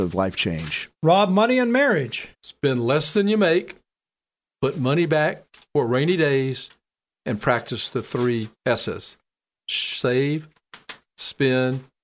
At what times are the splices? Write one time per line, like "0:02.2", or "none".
0:00.9
0:02.3
0:08.6